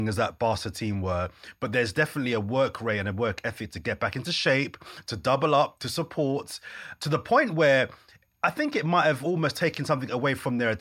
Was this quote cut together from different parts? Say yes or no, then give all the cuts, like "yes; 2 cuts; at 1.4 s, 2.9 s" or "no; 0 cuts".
no; 0 cuts